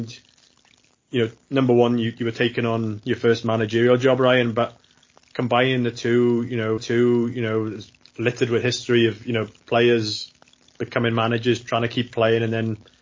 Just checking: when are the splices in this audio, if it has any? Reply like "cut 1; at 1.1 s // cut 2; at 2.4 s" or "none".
cut 1; at 6.8 s